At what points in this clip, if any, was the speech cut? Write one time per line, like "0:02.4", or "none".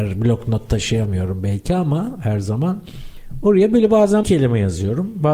0:04.2